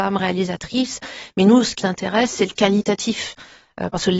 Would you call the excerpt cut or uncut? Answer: cut